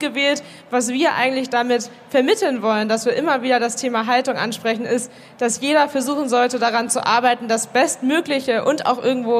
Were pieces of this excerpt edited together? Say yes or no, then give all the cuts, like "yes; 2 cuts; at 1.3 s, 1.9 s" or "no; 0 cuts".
no; 0 cuts